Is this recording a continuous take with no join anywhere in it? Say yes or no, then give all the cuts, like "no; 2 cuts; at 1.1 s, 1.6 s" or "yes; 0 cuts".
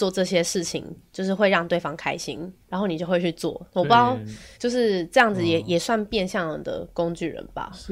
no; 2 cuts; at 2.6 s, 4.5 s